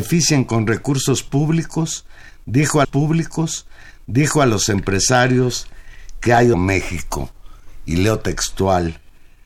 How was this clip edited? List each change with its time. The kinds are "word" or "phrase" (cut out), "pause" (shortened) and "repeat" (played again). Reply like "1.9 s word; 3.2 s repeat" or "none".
2.8 s repeat; 6.5 s word

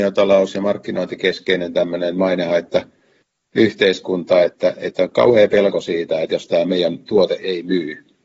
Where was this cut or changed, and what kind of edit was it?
none

